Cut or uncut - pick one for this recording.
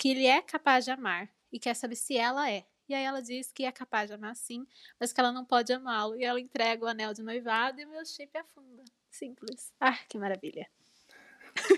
uncut